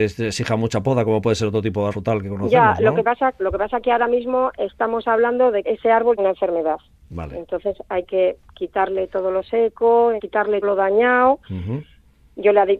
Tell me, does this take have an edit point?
yes; 6 cuts; at 1.9 s, 3.4 s, 5.6 s, 6.2 s, 10.2 s, 10.6 s

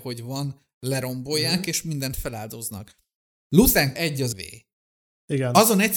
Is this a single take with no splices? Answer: no; 2 cuts; at 4.0 s, 4.3 s

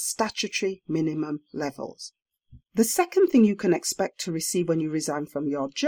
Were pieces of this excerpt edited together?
yes; 1 cut; at 2.6 s

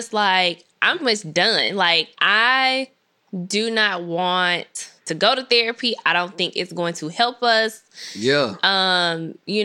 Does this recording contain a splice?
yes; 3 cuts; at 1.0 s, 2.1 s, 5.0 s

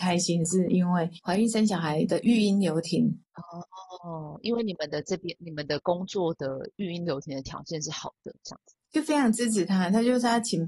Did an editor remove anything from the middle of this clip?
yes; 1 cut; at 8.4 s

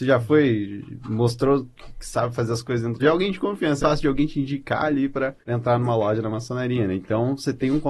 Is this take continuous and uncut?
no; 3 cuts; at 3.0 s, 3.8 s, 5.4 s

